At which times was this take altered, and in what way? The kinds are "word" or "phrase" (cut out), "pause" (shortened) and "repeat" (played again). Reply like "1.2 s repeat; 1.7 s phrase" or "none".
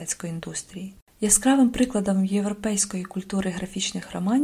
none